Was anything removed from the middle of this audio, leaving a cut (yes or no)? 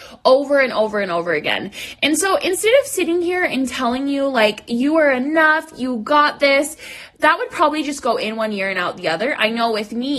no